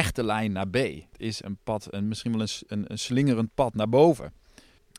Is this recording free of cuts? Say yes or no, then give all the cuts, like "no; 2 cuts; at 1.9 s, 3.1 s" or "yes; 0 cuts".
no; 1 cut; at 2.9 s